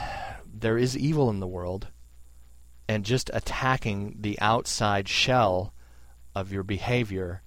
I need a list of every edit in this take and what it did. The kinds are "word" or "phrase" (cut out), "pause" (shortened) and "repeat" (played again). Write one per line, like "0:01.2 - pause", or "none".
none